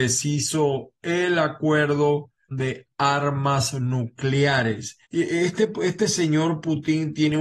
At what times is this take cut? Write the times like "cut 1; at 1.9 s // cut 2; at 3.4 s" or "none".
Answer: cut 1; at 2.5 s // cut 2; at 5.0 s